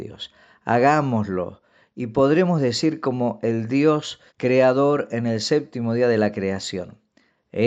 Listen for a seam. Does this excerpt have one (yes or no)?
yes